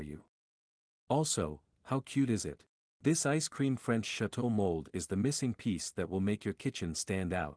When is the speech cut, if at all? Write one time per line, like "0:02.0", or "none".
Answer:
0:02.9